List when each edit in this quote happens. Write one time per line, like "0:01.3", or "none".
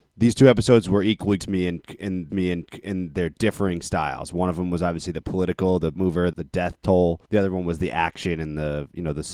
0:01.4
0:02.3
0:05.9
0:06.3
0:07.2